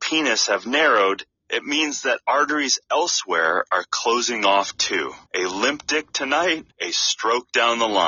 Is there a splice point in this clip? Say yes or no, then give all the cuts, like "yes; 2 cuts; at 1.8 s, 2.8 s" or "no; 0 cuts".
yes; 3 cuts; at 1.4 s, 5.3 s, 6.7 s